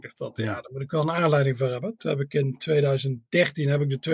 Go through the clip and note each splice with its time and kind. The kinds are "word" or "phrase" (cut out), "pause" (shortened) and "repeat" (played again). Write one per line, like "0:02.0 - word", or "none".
none